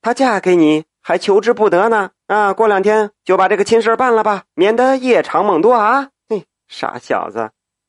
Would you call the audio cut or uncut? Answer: cut